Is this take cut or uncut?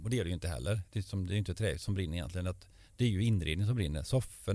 uncut